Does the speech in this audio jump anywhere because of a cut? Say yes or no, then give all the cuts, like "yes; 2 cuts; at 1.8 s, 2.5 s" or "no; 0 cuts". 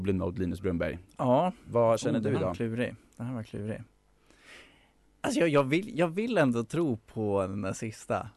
no; 0 cuts